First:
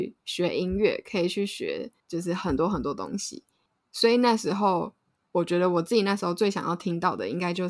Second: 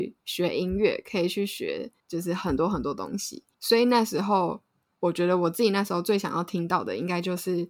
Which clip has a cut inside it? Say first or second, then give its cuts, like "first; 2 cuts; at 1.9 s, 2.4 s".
second; 1 cut; at 3.5 s